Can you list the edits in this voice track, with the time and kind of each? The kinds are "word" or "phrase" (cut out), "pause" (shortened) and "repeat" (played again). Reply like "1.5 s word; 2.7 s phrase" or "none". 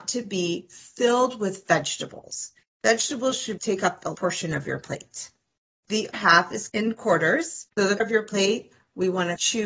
4.1 s word; 6.1 s word; 6.7 s word; 8.0 s word